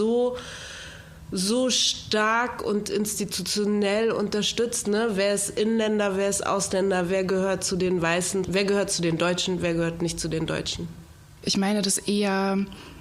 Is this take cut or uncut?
uncut